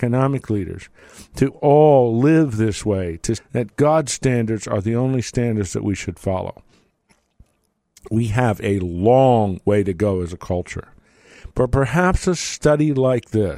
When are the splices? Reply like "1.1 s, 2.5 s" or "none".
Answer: 3.4 s